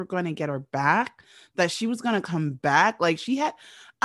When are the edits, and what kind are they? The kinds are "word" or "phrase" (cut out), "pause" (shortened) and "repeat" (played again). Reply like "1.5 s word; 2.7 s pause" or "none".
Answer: none